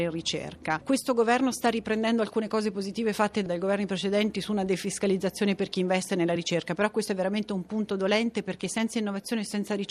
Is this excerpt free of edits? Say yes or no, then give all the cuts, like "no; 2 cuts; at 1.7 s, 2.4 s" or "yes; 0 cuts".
yes; 0 cuts